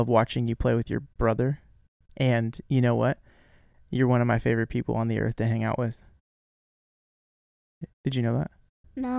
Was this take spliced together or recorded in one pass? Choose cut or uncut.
uncut